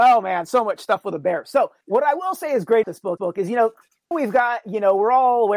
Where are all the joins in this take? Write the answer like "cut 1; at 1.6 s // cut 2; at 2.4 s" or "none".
cut 1; at 1.8 s // cut 2; at 2.8 s // cut 3; at 3.2 s // cut 4; at 4.1 s